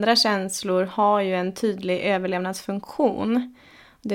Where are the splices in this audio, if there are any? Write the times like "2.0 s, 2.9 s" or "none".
none